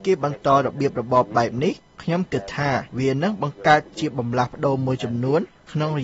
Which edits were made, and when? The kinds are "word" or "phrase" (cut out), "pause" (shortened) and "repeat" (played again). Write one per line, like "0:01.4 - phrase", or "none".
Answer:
0:02.9 - pause